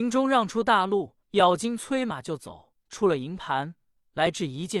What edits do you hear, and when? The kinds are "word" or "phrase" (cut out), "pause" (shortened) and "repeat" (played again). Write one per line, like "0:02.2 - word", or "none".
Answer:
0:01.2 - pause
0:02.8 - pause